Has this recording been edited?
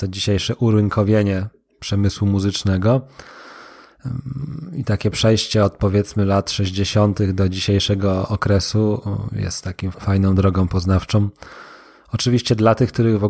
yes; 1 cut; at 9.9 s

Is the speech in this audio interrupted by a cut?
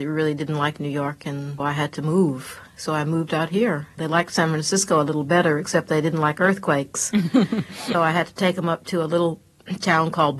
yes; 3 cuts; at 1.6 s, 4.0 s, 7.9 s

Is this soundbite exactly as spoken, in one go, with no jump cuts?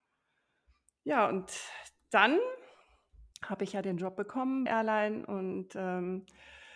no; 2 cuts; at 3.3 s, 4.7 s

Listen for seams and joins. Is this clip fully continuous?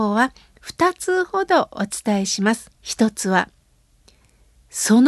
no; 1 cut; at 2.7 s

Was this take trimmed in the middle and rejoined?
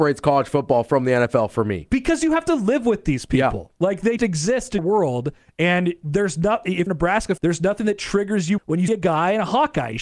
yes; 6 cuts; at 4.2 s, 4.8 s, 6.9 s, 7.4 s, 8.6 s, 8.9 s

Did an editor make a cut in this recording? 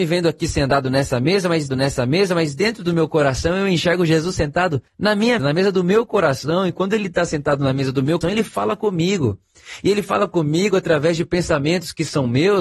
yes; 4 cuts; at 1.7 s, 4.9 s, 5.4 s, 8.2 s

